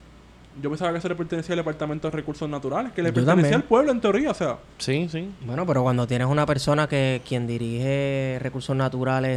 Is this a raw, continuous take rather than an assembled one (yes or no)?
yes